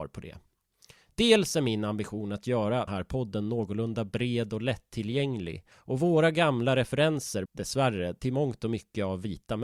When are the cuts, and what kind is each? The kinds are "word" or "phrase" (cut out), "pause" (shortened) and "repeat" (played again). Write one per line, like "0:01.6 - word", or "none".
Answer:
0:02.9 - word
0:05.7 - pause
0:07.5 - word